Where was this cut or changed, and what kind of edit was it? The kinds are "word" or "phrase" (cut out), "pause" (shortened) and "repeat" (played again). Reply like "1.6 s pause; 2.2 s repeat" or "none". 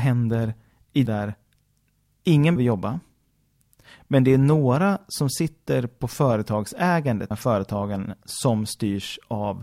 1.1 s phrase; 2.6 s word; 7.3 s phrase